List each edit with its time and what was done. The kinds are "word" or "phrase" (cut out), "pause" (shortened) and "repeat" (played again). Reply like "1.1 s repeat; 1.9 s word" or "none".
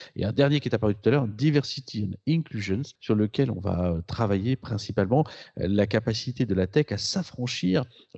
3.0 s pause